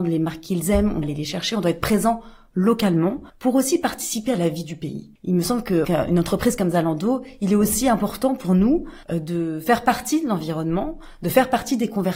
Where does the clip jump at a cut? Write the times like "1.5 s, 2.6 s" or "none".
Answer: 1.0 s, 3.3 s, 5.2 s, 5.8 s, 9.0 s